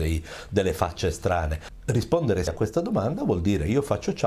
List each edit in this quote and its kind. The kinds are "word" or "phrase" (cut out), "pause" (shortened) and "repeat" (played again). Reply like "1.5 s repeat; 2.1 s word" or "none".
2.5 s word